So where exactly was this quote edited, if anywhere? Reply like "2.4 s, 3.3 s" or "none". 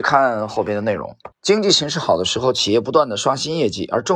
1.3 s